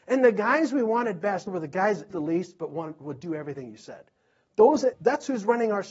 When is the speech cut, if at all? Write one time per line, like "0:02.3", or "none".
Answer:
0:01.5
0:02.1
0:04.9